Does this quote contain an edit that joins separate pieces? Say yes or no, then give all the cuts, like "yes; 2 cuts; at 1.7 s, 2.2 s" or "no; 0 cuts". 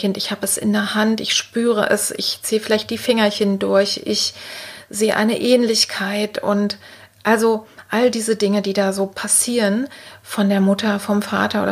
no; 0 cuts